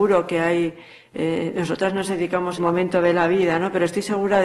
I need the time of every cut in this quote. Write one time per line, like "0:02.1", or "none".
0:02.6